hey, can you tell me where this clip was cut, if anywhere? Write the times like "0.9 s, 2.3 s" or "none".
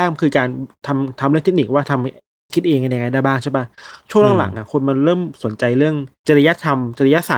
2.5 s, 6.2 s